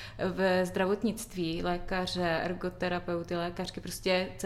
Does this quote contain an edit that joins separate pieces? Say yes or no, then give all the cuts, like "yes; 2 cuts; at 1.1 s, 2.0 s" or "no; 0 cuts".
no; 0 cuts